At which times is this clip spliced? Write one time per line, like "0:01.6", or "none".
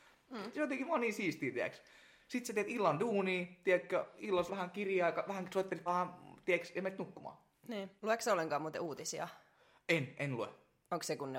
0:04.5
0:05.9
0:08.0